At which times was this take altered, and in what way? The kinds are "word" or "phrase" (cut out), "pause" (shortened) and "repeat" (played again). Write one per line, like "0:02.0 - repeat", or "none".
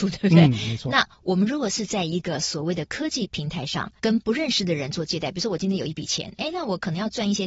0:04.0 - word